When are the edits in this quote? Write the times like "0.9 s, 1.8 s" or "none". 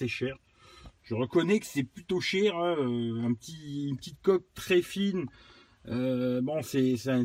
none